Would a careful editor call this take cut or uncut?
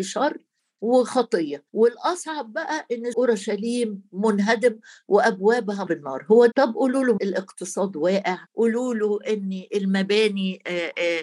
cut